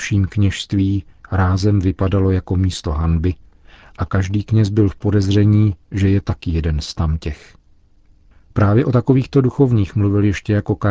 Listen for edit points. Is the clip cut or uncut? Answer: uncut